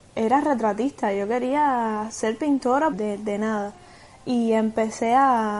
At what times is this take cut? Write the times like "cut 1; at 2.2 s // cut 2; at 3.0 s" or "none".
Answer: cut 1; at 2.9 s